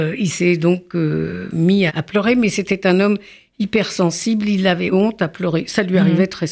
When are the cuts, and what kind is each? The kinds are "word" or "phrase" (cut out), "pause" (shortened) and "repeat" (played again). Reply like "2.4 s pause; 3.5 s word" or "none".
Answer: 1.9 s word; 4.9 s word